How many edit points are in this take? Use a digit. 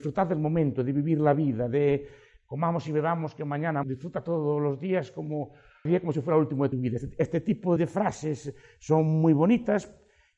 4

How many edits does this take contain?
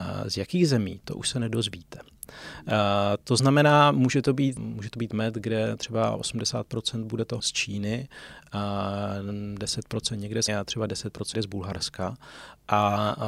4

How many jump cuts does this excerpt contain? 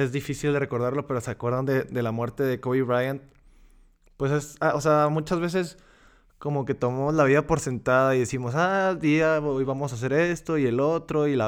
0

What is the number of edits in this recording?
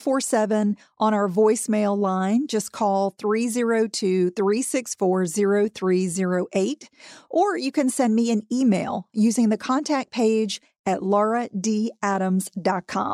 0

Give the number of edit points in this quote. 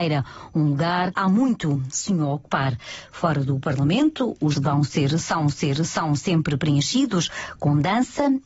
3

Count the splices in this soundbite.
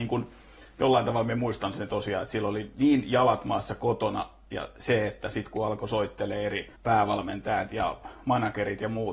1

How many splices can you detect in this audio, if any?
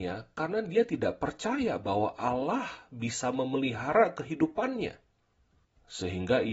0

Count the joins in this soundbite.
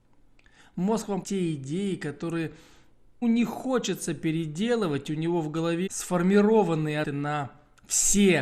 4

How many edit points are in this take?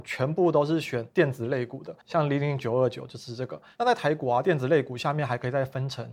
1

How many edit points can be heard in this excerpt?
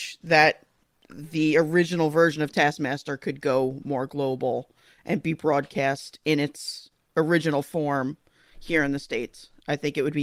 0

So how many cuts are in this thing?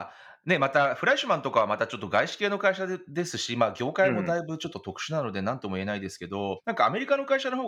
1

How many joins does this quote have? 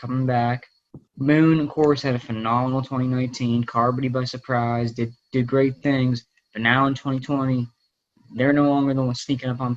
1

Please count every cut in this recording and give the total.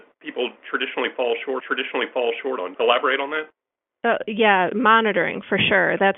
2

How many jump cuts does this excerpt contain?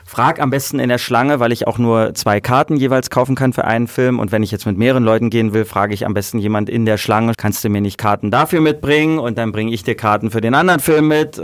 1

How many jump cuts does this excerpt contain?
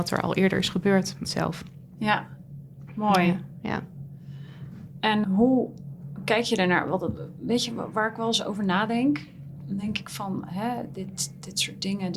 2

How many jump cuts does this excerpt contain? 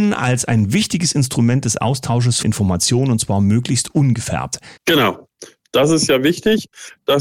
2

